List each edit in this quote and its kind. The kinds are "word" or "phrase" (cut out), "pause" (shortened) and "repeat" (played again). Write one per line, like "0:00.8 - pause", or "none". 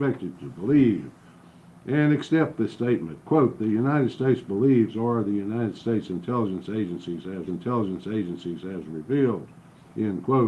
0:07.5 - repeat

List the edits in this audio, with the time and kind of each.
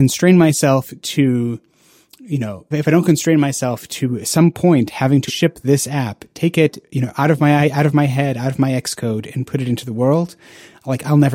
0:02.7 - word
0:05.3 - word

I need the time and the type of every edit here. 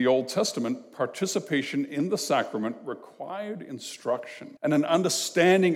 0:04.6 - pause

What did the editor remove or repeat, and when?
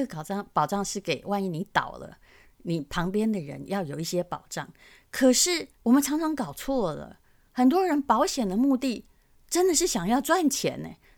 0:05.7 - pause

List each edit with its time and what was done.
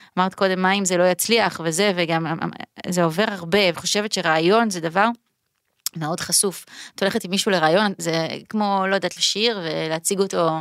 0:03.7 - word
0:08.5 - word
0:09.2 - word

